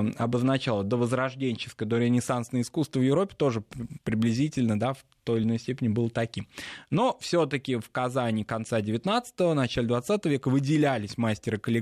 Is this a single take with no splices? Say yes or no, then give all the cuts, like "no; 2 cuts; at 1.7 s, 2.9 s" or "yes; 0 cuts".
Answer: yes; 0 cuts